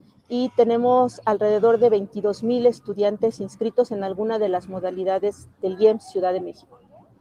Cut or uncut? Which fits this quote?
cut